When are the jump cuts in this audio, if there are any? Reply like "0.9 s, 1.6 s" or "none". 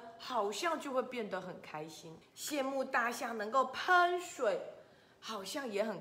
2.2 s